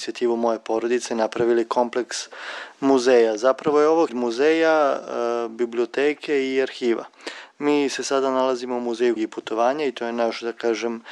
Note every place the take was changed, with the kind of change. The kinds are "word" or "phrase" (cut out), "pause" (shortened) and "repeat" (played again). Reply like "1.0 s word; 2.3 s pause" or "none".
4.1 s word; 9.2 s word